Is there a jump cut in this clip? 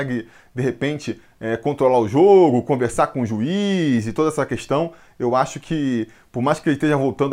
no; 0 cuts

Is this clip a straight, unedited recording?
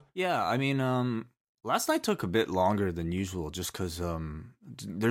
no; 1 cut; at 1.4 s

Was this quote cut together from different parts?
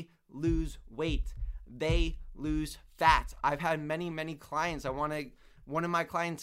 yes; 1 cut; at 4.1 s

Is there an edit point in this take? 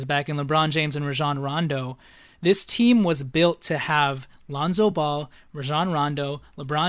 no; 0 cuts

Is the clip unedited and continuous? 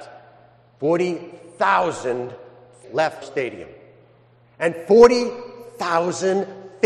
no; 2 cuts; at 2.8 s, 3.2 s

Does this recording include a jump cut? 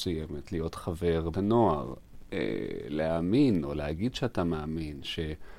yes; 1 cut; at 1.3 s

